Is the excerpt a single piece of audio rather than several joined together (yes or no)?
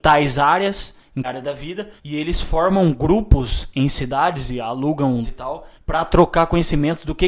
no